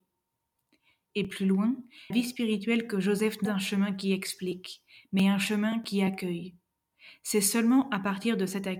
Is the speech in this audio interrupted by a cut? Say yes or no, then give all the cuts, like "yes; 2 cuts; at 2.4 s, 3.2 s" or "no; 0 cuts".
yes; 2 cuts; at 2.1 s, 3.4 s